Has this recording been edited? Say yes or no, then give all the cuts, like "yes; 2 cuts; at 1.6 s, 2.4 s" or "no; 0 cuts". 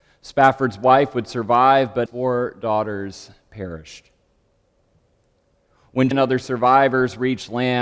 yes; 2 cuts; at 2.1 s, 6.1 s